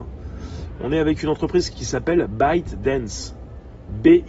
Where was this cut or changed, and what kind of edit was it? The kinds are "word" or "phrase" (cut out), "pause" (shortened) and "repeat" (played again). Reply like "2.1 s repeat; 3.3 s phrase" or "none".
1.7 s word